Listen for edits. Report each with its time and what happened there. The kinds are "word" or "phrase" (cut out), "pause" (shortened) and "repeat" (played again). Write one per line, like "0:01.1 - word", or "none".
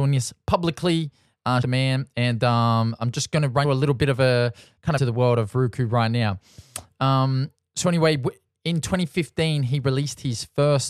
0:01.6 - phrase
0:03.6 - phrase
0:05.0 - phrase